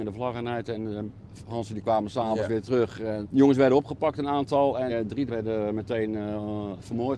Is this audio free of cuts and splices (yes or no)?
no